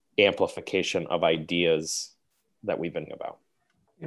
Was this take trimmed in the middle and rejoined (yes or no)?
yes